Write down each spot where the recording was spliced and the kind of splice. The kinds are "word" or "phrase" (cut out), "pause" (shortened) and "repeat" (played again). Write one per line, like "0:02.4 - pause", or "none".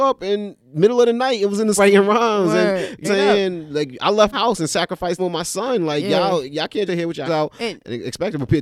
0:01.8 - word
0:03.0 - word
0:04.3 - word
0:05.2 - word
0:06.9 - word
0:07.3 - word